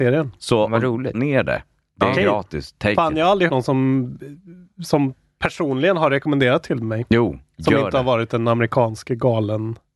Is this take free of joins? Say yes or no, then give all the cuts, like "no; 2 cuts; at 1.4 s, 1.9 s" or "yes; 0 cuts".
no; 2 cuts; at 1.1 s, 3.5 s